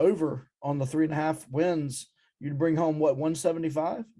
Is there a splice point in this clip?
no; 0 cuts

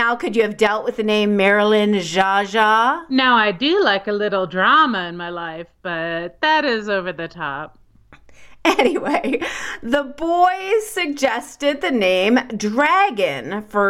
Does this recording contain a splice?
no; 0 cuts

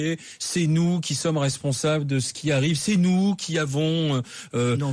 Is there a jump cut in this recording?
no; 0 cuts

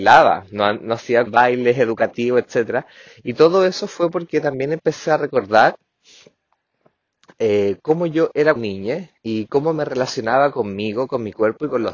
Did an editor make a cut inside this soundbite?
yes; 3 cuts; at 1.3 s, 8.6 s, 9.2 s

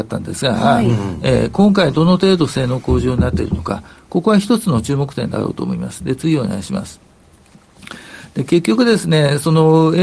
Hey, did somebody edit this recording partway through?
no; 0 cuts

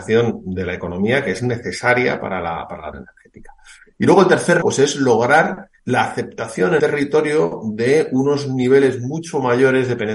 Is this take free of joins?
no; 4 cuts; at 2.9 s, 4.6 s, 5.8 s, 6.8 s

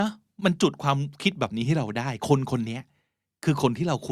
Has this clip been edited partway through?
no; 0 cuts

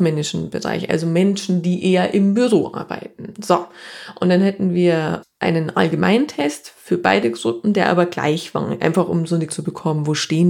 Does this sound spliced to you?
yes; 1 cut; at 9.5 s

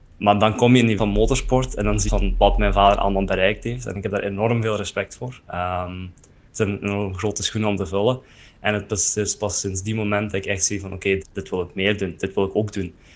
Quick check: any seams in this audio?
yes; 4 cuts; at 1.0 s, 2.1 s, 5.4 s, 11.2 s

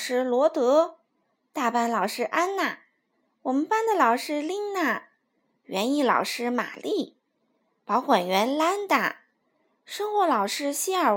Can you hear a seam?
no; 0 cuts

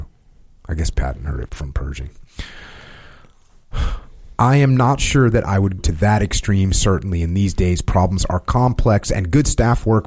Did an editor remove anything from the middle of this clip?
yes; 3 cuts; at 0.9 s, 1.5 s, 5.8 s

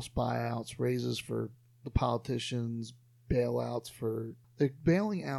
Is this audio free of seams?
yes; 0 cuts

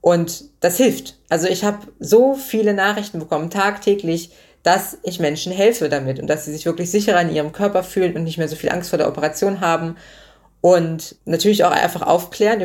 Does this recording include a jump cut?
no; 0 cuts

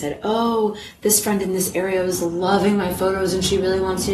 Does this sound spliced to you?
no; 0 cuts

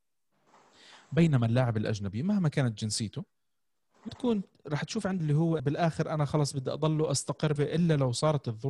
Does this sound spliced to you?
yes; 4 cuts; at 4.1 s, 5.2 s, 5.6 s, 7.6 s

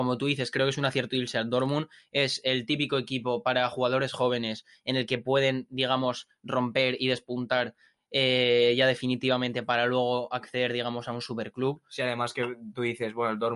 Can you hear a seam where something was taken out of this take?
no; 0 cuts

